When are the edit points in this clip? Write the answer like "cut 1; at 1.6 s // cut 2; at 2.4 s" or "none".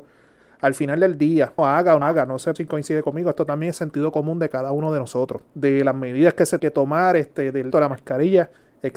cut 1; at 1.6 s // cut 2; at 2.0 s // cut 3; at 2.6 s // cut 4; at 5.5 s // cut 5; at 6.6 s // cut 6; at 7.7 s